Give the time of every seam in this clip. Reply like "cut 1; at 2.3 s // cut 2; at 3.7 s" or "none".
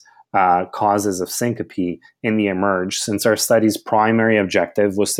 none